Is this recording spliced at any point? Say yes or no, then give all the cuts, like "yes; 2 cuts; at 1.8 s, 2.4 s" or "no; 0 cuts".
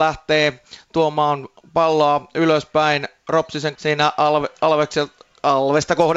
yes; 1 cut; at 3.8 s